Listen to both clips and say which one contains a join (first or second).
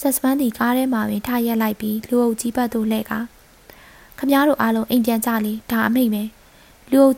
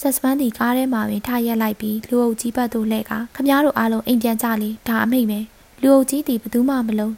second